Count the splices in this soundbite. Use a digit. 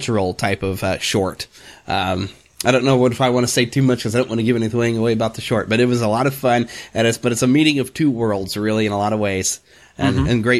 0